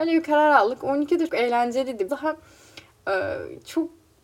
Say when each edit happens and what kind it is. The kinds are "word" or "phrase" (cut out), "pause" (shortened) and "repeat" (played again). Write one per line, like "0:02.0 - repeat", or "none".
0:01.3 - word
0:02.1 - word